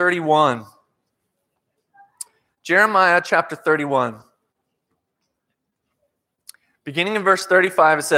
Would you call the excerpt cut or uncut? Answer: uncut